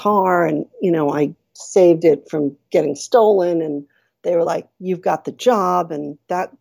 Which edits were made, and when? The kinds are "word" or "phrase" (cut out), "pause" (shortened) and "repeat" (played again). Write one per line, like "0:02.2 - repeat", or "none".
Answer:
none